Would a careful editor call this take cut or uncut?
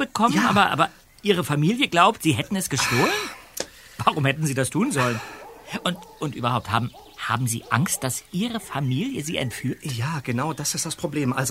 uncut